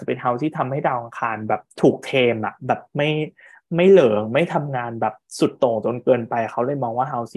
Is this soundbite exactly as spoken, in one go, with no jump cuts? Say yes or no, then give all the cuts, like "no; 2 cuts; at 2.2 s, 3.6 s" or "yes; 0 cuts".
yes; 0 cuts